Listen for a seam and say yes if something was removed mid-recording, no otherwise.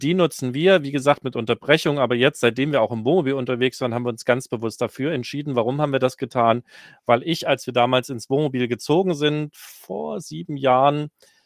no